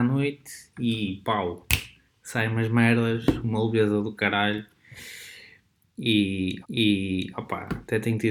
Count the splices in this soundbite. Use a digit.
1